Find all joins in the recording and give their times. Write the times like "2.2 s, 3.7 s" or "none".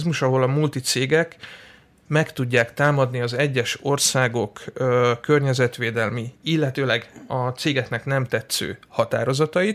none